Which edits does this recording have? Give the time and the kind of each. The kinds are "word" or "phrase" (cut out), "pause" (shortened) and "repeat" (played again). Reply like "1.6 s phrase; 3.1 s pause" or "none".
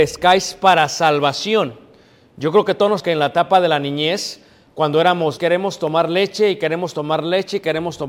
3.0 s word; 5.4 s word